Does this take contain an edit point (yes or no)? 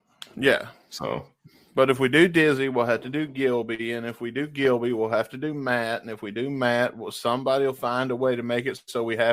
no